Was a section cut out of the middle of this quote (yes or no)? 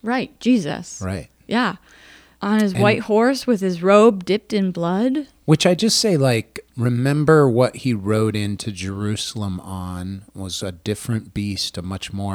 no